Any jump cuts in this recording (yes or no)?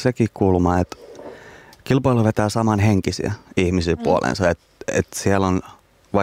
no